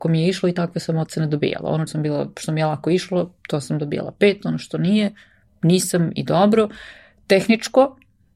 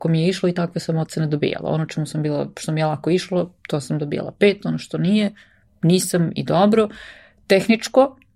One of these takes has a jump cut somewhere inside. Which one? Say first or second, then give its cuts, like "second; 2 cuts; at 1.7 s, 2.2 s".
first; 1 cut; at 1.9 s